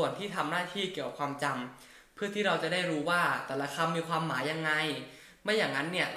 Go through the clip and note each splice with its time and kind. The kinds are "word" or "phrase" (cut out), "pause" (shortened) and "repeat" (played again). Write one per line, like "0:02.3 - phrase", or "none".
none